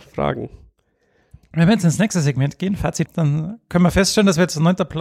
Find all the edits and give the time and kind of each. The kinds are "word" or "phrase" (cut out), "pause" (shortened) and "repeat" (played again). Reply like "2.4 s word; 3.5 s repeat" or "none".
3.1 s word